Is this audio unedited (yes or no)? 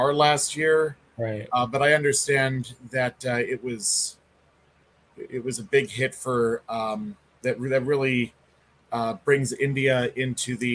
yes